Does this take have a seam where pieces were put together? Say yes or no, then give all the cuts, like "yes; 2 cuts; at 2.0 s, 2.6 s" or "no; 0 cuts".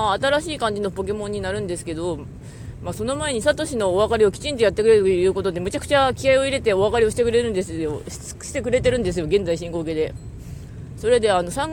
no; 0 cuts